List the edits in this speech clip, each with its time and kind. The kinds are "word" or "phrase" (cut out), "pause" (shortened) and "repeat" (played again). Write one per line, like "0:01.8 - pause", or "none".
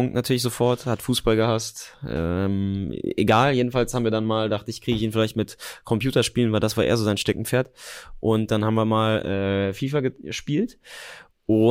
none